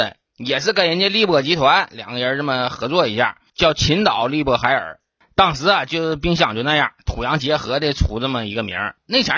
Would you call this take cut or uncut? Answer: uncut